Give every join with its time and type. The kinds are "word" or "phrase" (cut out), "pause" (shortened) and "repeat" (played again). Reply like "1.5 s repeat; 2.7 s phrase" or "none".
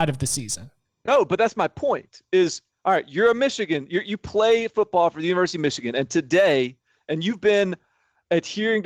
none